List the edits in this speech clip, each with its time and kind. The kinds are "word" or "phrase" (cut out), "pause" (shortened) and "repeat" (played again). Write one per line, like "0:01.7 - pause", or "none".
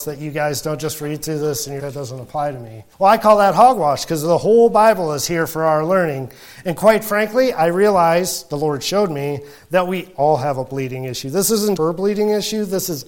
0:01.8 - word
0:02.9 - pause
0:11.8 - word

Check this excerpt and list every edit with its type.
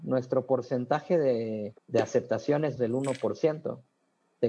0:01.8 - pause
0:02.8 - word

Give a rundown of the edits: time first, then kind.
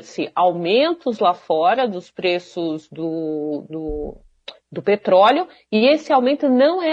none

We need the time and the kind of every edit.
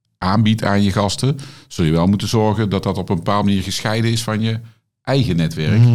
none

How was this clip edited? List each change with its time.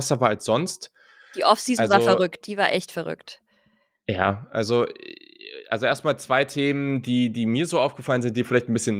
none

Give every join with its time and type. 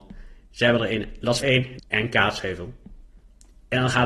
0:01.4 - word
0:01.8 - word

